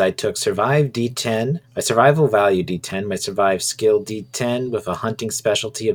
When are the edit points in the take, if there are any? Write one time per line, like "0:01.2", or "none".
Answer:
0:01.6